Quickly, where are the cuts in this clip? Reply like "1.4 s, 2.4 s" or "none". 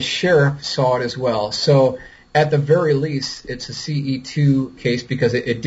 none